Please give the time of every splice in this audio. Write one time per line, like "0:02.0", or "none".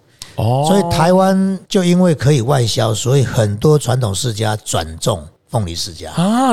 0:01.6